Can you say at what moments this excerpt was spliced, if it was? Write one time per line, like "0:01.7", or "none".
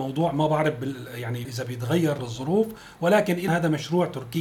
0:01.4
0:02.2
0:03.5